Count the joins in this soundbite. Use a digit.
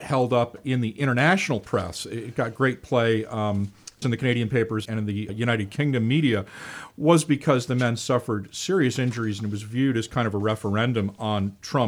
3